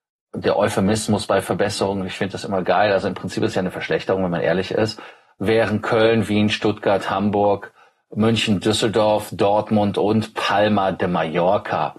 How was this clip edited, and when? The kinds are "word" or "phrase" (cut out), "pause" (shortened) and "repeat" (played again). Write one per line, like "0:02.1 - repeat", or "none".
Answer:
none